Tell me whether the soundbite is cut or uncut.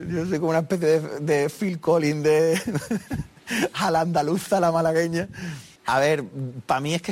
cut